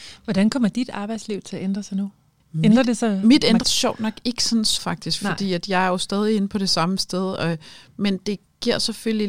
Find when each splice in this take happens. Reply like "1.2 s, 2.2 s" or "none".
3.6 s, 4.8 s